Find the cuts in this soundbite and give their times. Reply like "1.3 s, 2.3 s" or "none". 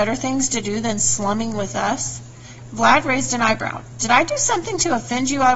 none